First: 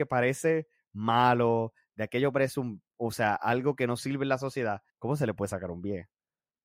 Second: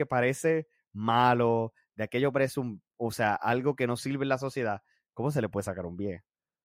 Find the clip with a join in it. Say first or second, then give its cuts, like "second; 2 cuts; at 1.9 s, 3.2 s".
first; 1 cut; at 4.9 s